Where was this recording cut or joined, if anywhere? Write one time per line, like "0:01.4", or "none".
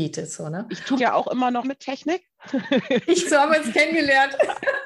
0:01.0
0:01.6
0:03.2